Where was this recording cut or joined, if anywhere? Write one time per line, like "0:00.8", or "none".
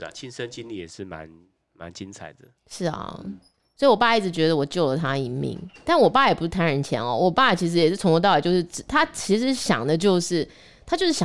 none